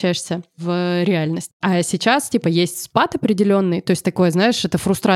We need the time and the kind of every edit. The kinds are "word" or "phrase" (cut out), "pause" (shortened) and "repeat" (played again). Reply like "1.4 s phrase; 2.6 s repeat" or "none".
none